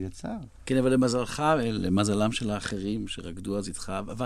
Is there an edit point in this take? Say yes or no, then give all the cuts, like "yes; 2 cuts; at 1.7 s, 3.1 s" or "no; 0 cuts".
no; 0 cuts